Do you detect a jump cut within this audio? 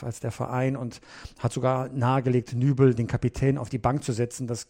no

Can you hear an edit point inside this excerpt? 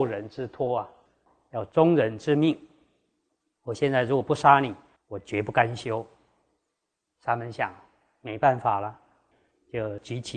no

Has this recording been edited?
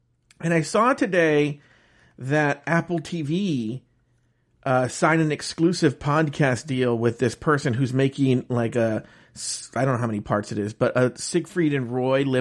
no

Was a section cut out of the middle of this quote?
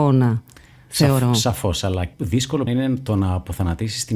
yes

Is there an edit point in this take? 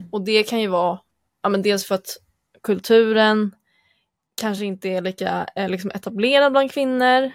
no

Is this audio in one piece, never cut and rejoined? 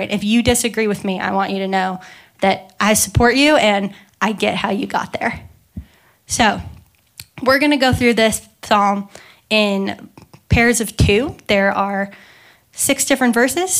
yes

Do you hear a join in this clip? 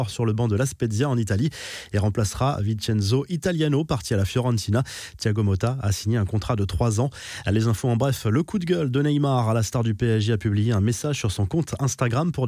no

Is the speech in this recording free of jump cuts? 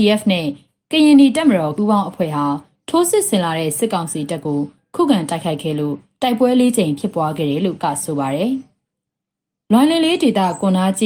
no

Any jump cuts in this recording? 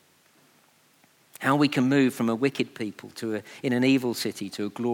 no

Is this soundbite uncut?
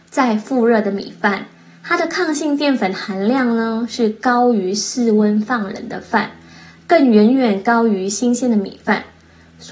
yes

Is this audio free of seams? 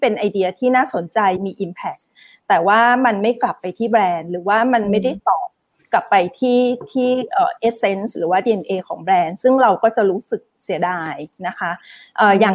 yes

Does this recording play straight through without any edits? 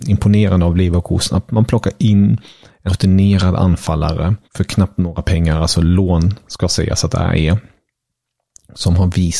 no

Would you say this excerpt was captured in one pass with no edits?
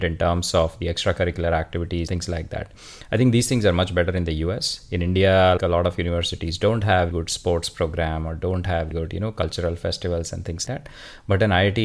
no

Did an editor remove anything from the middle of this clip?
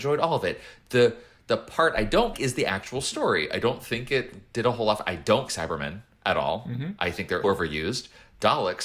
yes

